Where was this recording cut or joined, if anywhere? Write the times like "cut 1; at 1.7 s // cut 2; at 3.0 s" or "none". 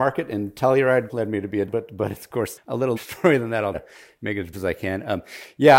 cut 1; at 1.1 s // cut 2; at 1.7 s // cut 3; at 2.6 s // cut 4; at 3.0 s // cut 5; at 3.7 s // cut 6; at 4.5 s